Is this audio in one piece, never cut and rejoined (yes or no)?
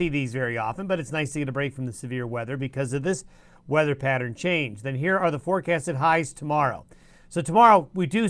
yes